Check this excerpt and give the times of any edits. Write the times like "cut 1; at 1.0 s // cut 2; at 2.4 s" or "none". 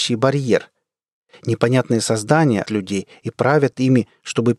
cut 1; at 2.6 s

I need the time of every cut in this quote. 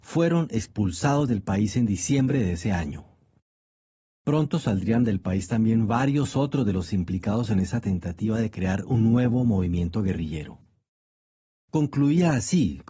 none

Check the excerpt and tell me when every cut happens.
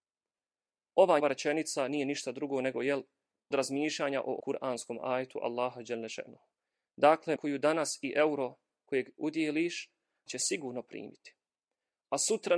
cut 1; at 1.2 s // cut 2; at 3.5 s // cut 3; at 4.4 s // cut 4; at 7.4 s // cut 5; at 10.3 s

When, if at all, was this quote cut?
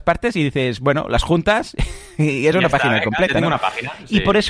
none

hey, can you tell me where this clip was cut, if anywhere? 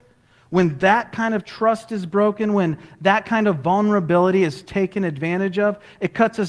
none

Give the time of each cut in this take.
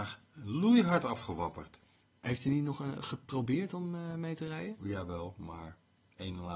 cut 1; at 2.0 s

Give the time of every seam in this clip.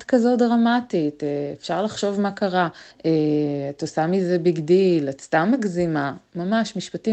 cut 1; at 2.9 s

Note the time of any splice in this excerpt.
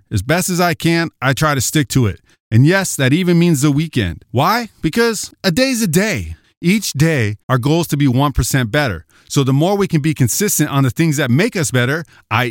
cut 1; at 7.4 s

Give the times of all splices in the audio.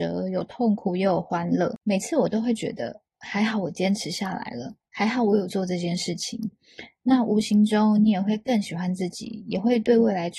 cut 1; at 4.9 s

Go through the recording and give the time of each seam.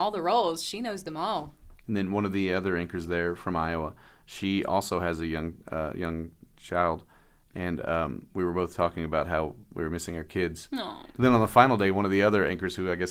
none

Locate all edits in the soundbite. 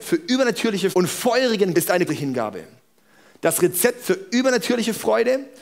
cut 1; at 0.9 s // cut 2; at 1.7 s // cut 3; at 2.1 s

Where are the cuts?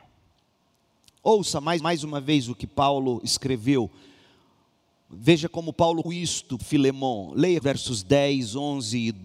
cut 1; at 1.8 s // cut 2; at 6.0 s // cut 3; at 6.6 s // cut 4; at 7.6 s

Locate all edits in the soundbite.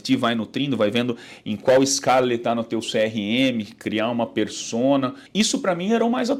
cut 1; at 5.3 s

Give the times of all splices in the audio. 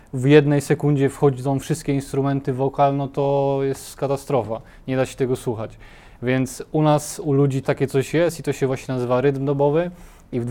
cut 1; at 7.6 s

